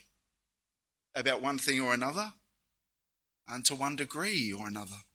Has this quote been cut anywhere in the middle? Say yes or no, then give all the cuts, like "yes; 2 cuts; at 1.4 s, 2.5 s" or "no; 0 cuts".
no; 0 cuts